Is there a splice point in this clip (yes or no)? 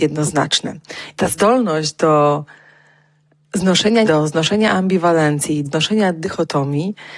yes